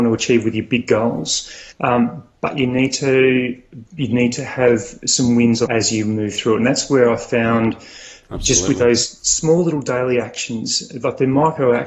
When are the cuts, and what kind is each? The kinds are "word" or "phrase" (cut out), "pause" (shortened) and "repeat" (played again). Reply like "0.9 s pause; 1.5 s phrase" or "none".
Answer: 1.7 s pause; 3.9 s pause; 5.7 s phrase